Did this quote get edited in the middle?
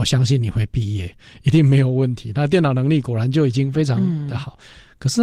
no; 0 cuts

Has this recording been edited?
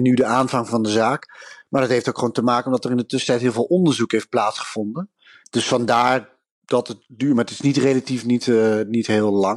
no; 0 cuts

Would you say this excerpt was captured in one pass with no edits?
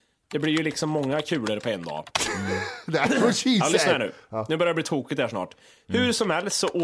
yes; 0 cuts

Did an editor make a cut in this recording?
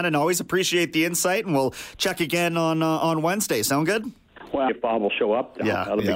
yes; 1 cut; at 4.7 s

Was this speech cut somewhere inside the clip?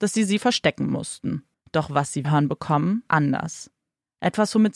yes; 3 cuts; at 1.5 s, 2.2 s, 3.1 s

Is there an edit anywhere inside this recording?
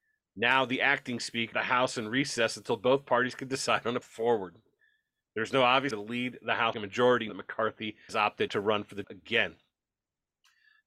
yes; 8 cuts; at 1.5 s, 4.0 s, 5.9 s, 6.7 s, 7.3 s, 8.1 s, 8.5 s, 9.0 s

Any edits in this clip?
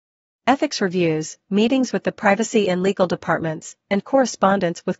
no; 0 cuts

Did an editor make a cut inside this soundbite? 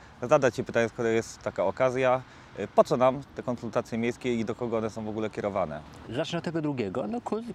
no; 0 cuts

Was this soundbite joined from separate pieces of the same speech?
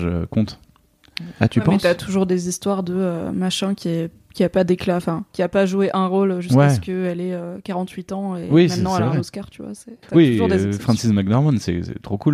yes; 2 cuts; at 5.3 s, 10.0 s

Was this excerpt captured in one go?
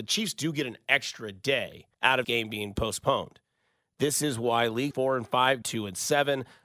no; 4 cuts; at 1.9 s, 2.2 s, 4.9 s, 5.6 s

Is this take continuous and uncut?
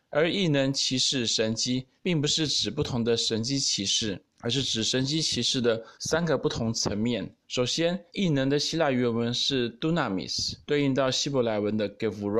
no; 6 cuts; at 2.0 s, 4.3 s, 5.9 s, 7.4 s, 8.1 s, 10.6 s

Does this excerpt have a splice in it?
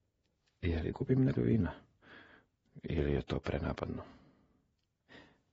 yes; 2 cuts; at 0.9 s, 1.4 s

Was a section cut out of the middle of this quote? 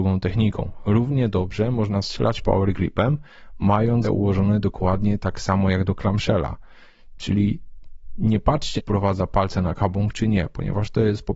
yes; 2 cuts; at 4.0 s, 8.8 s

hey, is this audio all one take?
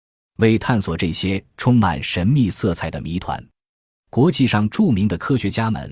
yes; 0 cuts

